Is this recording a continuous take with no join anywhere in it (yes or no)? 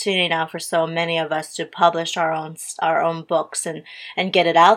yes